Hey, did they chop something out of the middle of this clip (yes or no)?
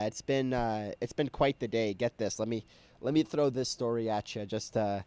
no